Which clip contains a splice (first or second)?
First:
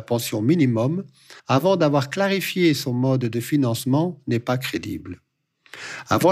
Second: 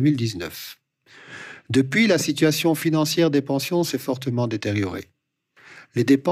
first